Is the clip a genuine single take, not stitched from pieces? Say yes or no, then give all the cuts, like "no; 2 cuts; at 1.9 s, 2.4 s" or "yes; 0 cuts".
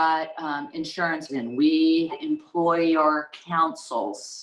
no; 2 cuts; at 1.3 s, 2.1 s